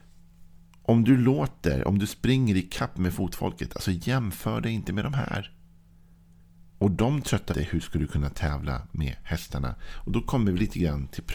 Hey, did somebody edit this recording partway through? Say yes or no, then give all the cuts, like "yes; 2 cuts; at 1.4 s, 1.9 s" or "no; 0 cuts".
yes; 2 cuts; at 6.7 s, 7.5 s